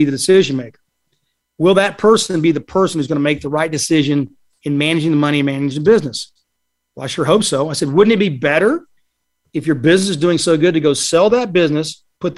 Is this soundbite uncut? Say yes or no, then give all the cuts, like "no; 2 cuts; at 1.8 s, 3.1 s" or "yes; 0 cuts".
yes; 0 cuts